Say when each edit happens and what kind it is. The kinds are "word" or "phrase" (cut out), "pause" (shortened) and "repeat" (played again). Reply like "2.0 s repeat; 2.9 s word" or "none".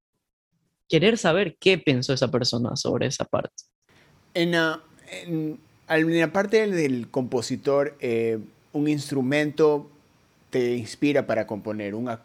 none